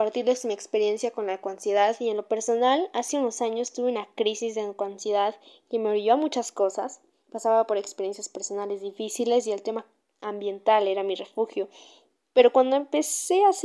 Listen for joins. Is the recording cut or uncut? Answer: uncut